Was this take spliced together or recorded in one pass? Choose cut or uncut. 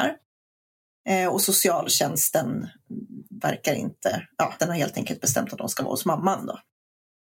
cut